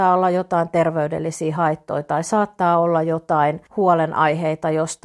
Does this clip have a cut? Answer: yes; 1 cut; at 3.7 s

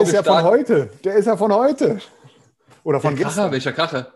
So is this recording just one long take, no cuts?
yes; 0 cuts

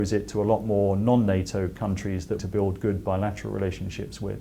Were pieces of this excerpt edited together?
yes; 1 cut; at 2.4 s

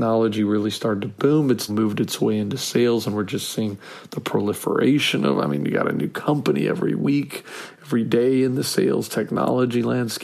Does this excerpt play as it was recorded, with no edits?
no; 1 cut; at 1.7 s

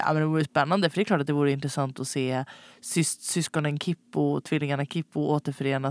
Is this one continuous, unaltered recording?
yes; 0 cuts

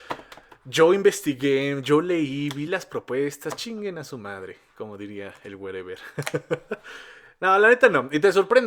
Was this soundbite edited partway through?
no; 0 cuts

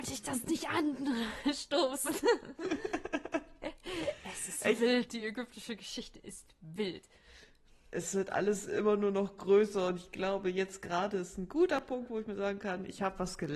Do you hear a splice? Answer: no; 0 cuts

